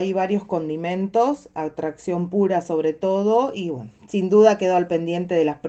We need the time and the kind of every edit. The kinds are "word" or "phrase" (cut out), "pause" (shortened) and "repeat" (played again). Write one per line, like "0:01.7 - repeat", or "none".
none